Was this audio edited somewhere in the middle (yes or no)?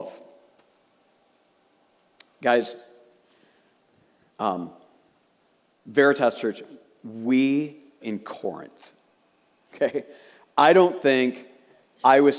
yes